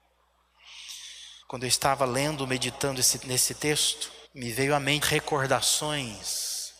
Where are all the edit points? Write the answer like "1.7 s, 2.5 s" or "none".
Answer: 1.4 s, 3.2 s, 4.2 s, 5.0 s